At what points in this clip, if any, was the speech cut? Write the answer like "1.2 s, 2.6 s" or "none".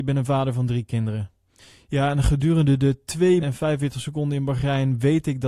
1.6 s, 3.4 s